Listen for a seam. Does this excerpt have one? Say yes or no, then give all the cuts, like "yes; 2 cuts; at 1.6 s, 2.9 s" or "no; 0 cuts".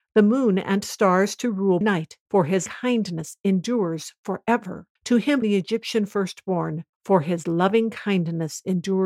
yes; 6 cuts; at 1.8 s, 2.2 s, 2.7 s, 5.0 s, 5.4 s, 6.9 s